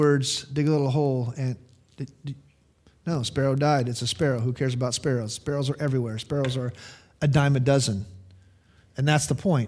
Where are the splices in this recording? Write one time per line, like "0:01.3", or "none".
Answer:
none